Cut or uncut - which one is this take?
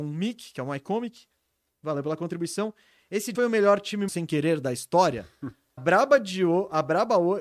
cut